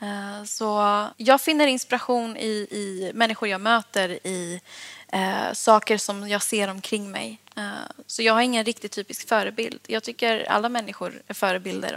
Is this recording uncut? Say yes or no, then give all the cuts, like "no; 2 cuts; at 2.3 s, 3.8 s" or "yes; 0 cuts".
no; 1 cut; at 1.1 s